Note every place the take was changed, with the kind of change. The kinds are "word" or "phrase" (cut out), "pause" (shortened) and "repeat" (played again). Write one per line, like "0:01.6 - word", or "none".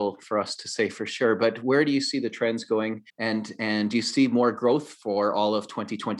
0:03.1 - pause